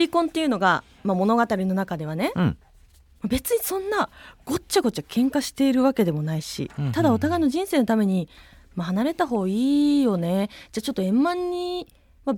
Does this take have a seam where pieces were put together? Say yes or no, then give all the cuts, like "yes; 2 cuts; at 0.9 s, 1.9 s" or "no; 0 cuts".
no; 0 cuts